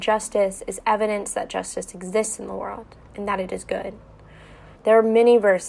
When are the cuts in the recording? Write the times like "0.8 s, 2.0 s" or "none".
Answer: 4.7 s